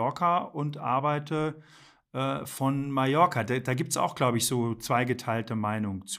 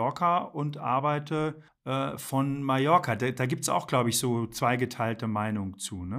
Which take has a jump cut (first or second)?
second